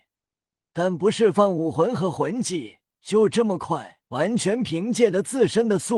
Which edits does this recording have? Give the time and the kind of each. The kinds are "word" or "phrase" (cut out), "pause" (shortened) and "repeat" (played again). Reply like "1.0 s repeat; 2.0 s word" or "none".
2.9 s pause; 4.0 s pause